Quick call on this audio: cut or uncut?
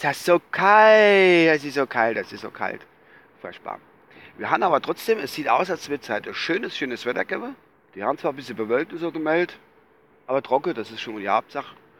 cut